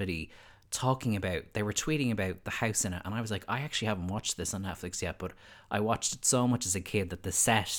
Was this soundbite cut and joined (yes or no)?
no